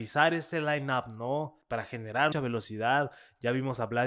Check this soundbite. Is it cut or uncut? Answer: cut